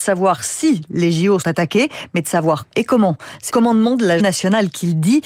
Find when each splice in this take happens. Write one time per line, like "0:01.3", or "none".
0:01.4
0:02.7
0:03.5
0:04.2